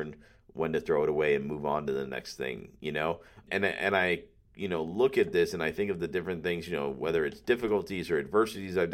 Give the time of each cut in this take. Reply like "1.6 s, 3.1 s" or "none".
3.5 s